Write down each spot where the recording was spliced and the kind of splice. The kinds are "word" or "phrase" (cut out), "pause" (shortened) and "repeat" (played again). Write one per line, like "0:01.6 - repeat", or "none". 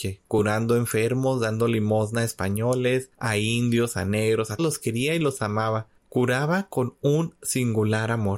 0:03.1 - pause
0:04.6 - word
0:06.0 - pause